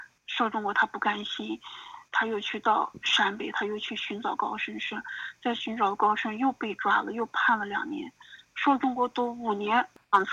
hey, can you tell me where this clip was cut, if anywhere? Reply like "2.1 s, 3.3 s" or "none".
2.1 s